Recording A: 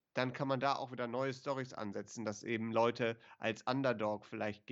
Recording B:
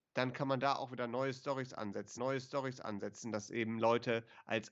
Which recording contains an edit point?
B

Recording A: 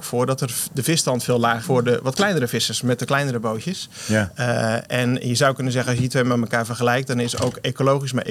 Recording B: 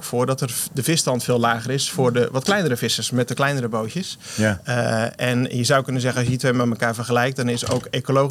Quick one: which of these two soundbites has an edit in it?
A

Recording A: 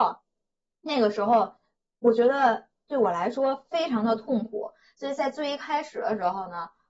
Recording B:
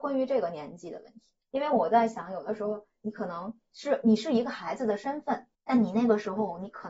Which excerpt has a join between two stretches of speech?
B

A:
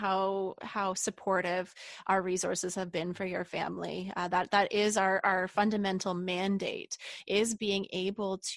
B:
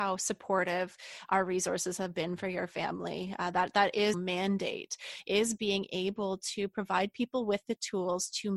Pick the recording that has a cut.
B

